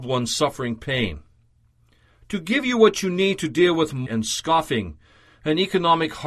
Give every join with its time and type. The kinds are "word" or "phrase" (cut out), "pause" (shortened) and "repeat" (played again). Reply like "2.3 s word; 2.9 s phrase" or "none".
4.1 s word